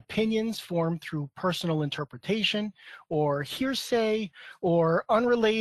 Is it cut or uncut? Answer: uncut